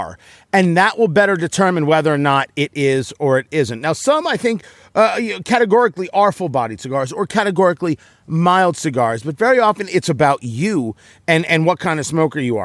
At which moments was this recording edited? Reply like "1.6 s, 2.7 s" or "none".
none